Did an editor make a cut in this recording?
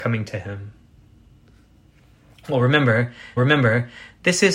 yes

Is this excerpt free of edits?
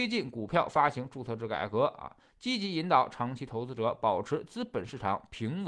yes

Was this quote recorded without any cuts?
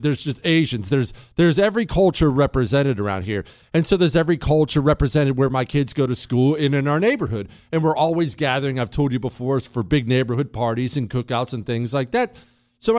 yes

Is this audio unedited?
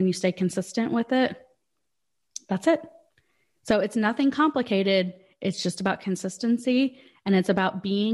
yes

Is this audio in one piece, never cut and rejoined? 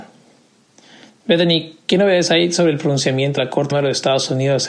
no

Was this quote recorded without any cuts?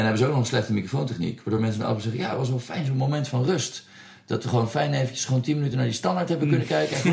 yes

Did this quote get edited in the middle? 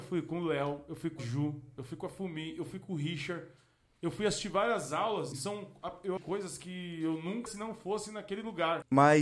yes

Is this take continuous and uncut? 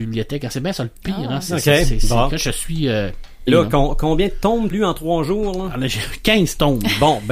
no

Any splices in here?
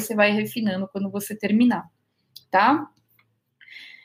no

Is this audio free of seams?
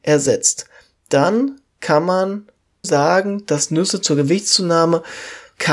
no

